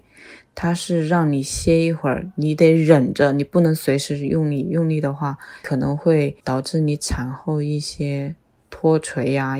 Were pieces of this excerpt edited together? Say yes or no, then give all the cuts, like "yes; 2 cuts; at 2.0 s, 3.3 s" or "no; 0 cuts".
no; 0 cuts